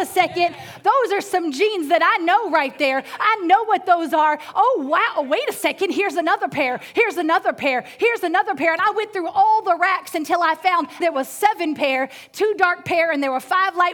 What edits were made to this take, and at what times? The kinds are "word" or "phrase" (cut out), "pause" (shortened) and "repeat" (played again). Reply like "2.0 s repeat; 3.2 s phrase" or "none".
11.0 s word